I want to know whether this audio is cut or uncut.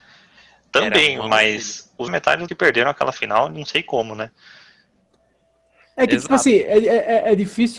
cut